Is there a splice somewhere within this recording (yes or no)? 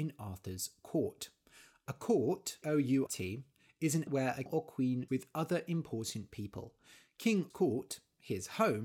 yes